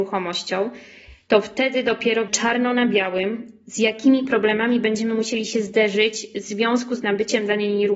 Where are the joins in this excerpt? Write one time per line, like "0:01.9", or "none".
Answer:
0:02.3